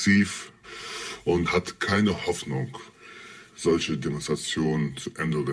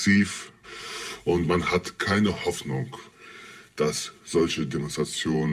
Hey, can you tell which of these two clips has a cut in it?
first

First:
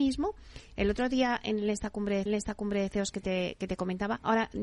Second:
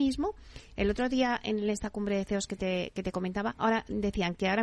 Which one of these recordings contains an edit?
first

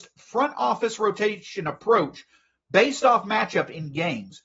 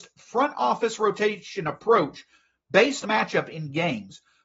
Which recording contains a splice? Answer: second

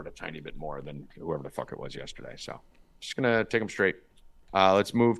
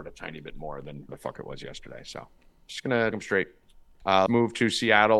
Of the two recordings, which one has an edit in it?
second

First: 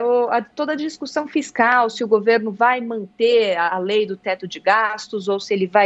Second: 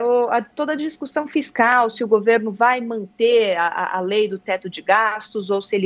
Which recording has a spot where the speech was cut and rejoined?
first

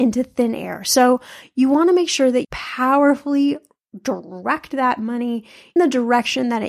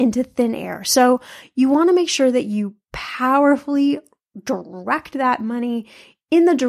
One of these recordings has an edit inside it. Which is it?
first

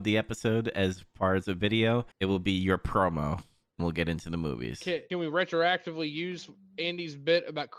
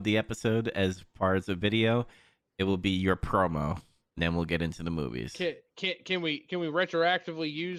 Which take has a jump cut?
first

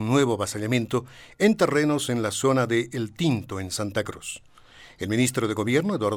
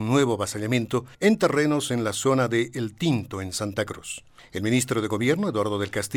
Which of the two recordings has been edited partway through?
second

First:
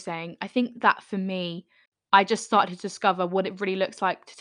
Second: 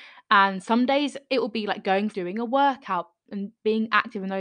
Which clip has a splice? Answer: second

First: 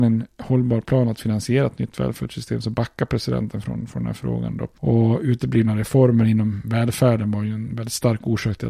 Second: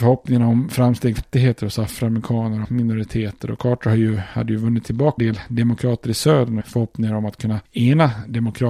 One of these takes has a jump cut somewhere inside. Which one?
second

